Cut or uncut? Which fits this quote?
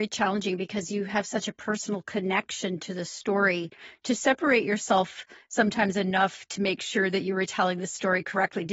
uncut